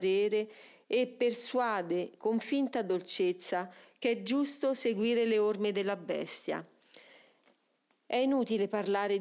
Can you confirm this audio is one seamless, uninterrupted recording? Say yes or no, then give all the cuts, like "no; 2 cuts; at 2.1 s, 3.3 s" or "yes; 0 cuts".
yes; 0 cuts